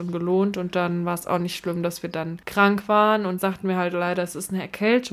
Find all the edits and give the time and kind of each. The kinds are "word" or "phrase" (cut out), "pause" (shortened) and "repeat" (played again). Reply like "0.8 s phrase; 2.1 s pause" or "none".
3.4 s word